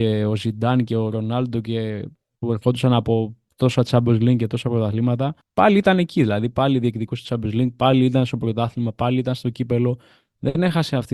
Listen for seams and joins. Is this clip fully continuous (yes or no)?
yes